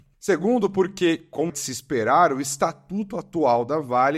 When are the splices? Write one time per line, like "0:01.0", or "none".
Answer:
0:01.5